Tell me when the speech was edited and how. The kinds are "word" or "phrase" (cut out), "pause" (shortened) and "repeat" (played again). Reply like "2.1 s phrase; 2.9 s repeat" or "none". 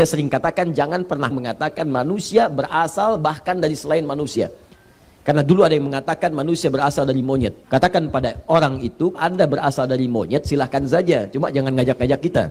1.3 s phrase; 7.6 s pause; 9.1 s word